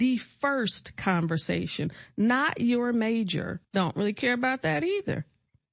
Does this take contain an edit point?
yes; 1 cut; at 3.6 s

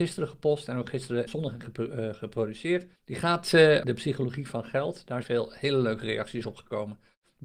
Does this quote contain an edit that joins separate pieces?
yes; 5 cuts; at 1.3 s, 1.6 s, 3.0 s, 3.8 s, 5.2 s

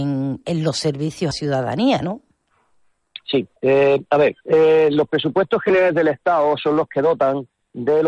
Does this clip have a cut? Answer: yes; 3 cuts; at 1.3 s, 3.6 s, 4.4 s

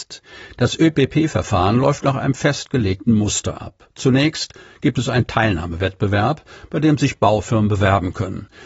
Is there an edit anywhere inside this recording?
no; 0 cuts

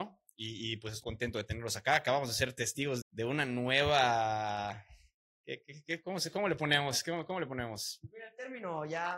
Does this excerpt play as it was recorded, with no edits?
no; 2 cuts; at 1.0 s, 3.0 s

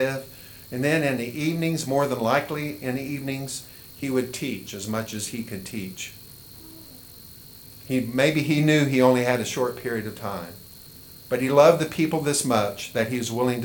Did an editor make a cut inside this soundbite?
no; 0 cuts

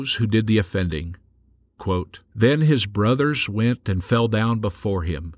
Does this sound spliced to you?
yes; 1 cut; at 2.3 s

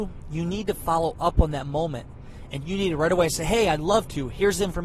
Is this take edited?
no; 0 cuts

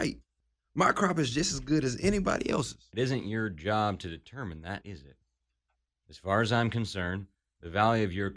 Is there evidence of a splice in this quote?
yes; 1 cut; at 4.8 s

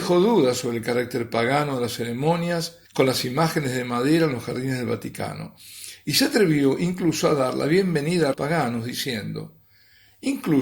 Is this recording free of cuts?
no; 2 cuts; at 2.8 s, 8.3 s

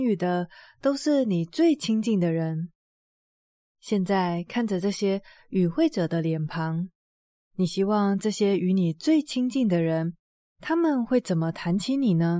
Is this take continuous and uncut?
yes; 0 cuts

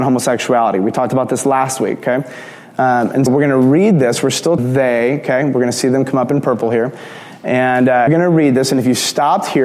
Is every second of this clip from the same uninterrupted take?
no; 3 cuts; at 3.3 s, 4.6 s, 8.1 s

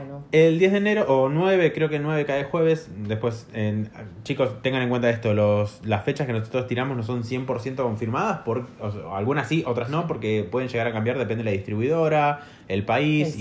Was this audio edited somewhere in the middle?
no; 0 cuts

